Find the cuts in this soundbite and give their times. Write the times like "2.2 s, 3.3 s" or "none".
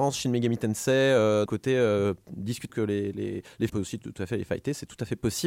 1.5 s, 2.7 s, 3.7 s